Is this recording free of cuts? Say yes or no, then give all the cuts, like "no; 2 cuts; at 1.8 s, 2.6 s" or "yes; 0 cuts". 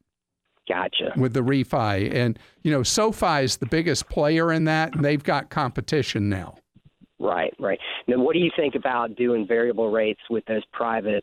yes; 0 cuts